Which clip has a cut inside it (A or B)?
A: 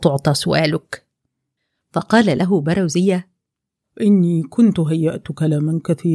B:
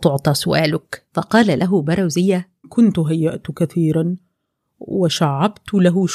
B